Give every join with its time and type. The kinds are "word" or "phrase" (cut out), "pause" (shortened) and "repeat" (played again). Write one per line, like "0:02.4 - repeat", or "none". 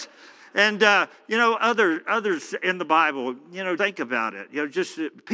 0:01.6 - word
0:03.8 - word